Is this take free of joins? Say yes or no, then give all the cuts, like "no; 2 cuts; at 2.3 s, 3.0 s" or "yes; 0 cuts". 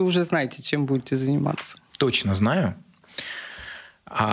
no; 1 cut; at 1.9 s